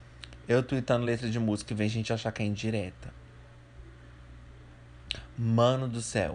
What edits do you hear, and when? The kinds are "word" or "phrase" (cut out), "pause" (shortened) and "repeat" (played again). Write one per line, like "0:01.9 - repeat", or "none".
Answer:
none